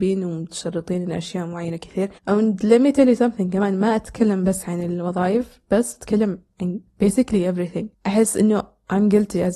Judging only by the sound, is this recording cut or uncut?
cut